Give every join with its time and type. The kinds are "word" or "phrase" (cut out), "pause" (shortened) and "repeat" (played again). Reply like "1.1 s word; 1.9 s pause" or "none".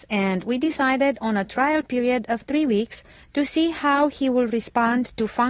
none

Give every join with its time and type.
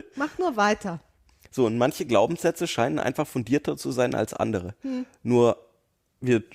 none

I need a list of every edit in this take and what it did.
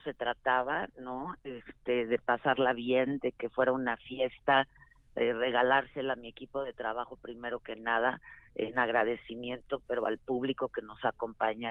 none

